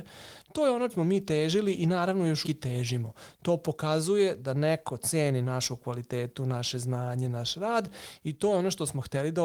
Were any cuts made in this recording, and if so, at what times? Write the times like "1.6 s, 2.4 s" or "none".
0.9 s, 2.4 s